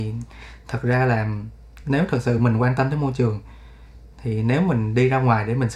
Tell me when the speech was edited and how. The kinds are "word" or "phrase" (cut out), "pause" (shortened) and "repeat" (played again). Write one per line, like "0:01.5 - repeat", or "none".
none